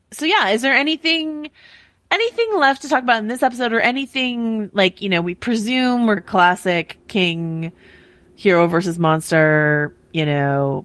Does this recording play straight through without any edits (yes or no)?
no